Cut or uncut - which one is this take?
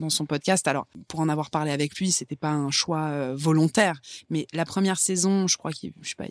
uncut